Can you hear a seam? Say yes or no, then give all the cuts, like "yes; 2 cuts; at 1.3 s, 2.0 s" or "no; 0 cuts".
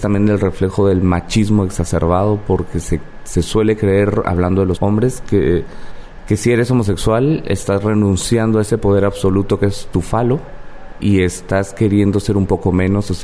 yes; 2 cuts; at 4.8 s, 11.0 s